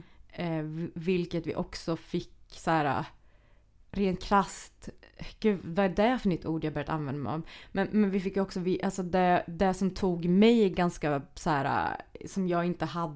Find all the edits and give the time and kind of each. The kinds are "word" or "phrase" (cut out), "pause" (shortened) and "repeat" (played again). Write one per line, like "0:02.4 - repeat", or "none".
none